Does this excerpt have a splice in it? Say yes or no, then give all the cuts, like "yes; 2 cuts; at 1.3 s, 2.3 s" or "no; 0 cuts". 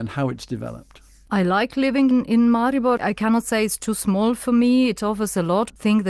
no; 0 cuts